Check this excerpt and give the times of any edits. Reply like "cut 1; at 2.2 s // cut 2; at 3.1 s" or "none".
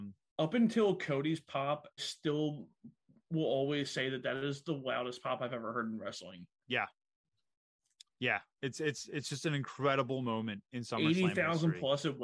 cut 1; at 2.0 s